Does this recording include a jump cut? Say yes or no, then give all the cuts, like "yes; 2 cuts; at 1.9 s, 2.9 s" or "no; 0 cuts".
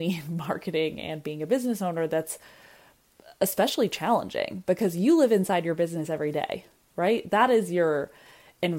no; 0 cuts